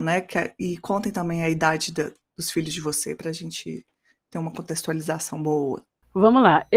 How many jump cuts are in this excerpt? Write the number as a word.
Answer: zero